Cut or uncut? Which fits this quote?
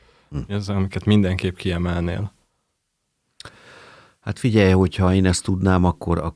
uncut